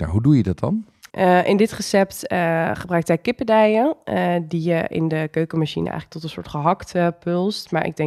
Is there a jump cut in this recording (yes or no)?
yes